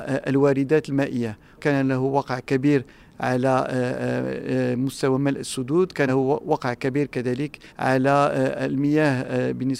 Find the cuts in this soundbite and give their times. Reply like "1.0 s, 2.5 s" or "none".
1.6 s, 6.1 s, 7.7 s